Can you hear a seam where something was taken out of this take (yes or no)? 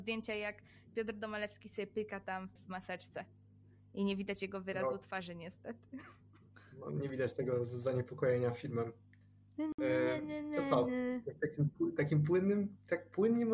yes